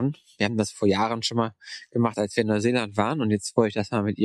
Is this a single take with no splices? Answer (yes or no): yes